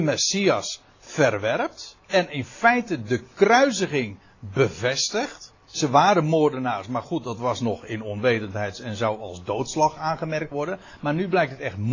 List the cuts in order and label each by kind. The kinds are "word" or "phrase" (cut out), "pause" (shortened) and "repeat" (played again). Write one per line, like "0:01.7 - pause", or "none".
0:02.0 - pause
0:05.6 - pause
0:10.5 - word